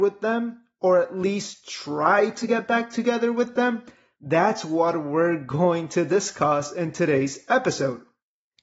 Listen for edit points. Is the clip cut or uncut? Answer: uncut